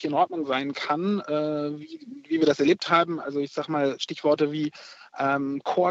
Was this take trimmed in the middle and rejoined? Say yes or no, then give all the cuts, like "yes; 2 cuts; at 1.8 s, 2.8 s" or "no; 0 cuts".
no; 0 cuts